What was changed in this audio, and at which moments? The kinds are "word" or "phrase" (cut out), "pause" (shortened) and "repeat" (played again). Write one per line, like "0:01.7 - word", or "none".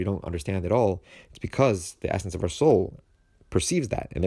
none